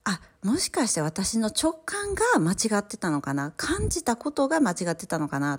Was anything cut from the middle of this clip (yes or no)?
no